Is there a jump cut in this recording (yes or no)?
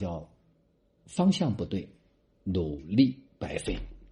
no